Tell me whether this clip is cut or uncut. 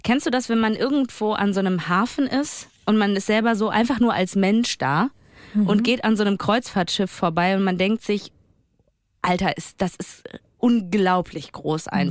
uncut